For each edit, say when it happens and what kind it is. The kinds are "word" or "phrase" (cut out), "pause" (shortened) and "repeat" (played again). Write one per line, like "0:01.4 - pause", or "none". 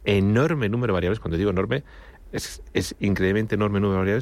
none